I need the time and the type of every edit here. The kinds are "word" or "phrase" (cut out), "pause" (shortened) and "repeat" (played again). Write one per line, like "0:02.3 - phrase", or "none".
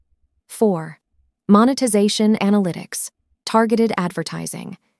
0:02.4 - word